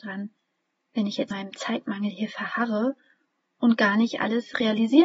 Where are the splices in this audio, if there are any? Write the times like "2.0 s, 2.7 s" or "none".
1.3 s